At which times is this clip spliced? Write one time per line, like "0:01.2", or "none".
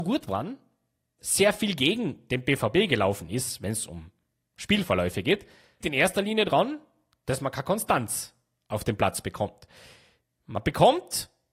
0:01.2
0:05.8